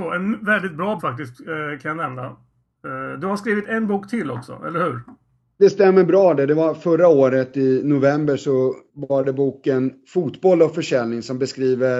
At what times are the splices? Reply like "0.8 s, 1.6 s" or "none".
1.0 s, 8.9 s